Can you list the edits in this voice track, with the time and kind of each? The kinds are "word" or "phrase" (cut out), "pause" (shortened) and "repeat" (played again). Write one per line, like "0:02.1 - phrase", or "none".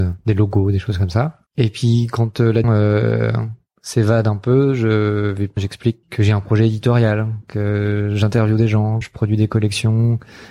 0:01.5 - pause
0:02.6 - word
0:05.6 - word
0:06.0 - word
0:09.0 - word